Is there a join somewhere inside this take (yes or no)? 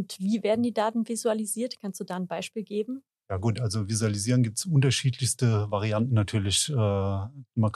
yes